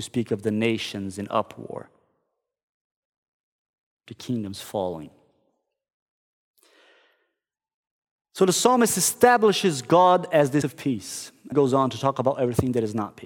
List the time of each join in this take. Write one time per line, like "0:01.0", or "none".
0:10.6
0:11.5